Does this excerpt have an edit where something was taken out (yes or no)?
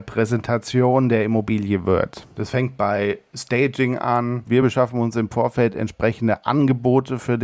no